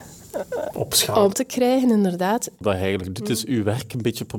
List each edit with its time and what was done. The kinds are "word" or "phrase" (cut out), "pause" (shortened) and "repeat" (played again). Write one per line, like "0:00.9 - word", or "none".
0:01.3 - word

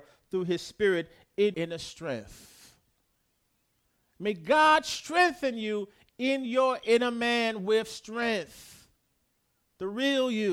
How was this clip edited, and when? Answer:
0:01.5 - word

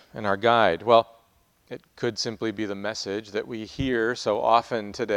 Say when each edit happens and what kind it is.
none

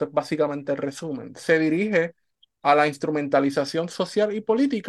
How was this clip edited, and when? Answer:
none

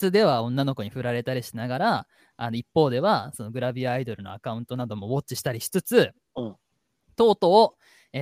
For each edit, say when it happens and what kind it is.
none

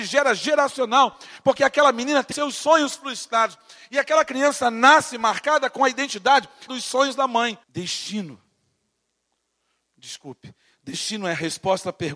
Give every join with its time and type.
0:02.3 - word
0:06.7 - phrase
0:07.6 - pause

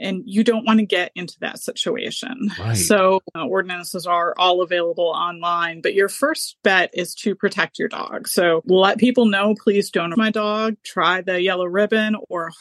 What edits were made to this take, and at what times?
0:10.1 - word

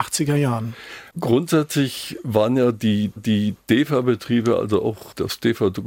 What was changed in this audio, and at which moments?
0:01.1 - pause
0:03.2 - repeat

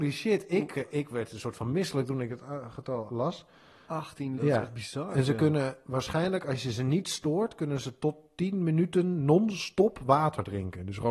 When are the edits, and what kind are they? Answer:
0:03.1 - word
0:04.4 - word

